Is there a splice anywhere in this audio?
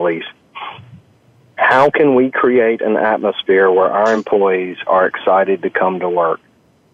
no; 0 cuts

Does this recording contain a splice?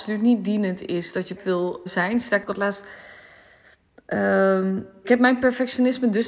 yes; 4 cuts; at 1.4 s, 1.9 s, 2.4 s, 5.0 s

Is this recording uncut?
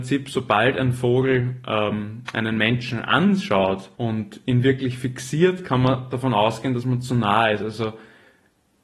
no; 1 cut; at 3.9 s

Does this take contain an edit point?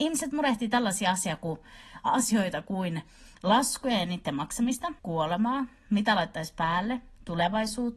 yes; 1 cut; at 5.0 s

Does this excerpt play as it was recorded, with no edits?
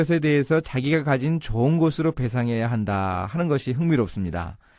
yes; 0 cuts

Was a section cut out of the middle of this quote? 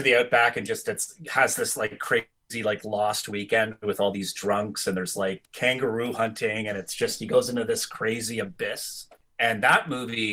no; 0 cuts

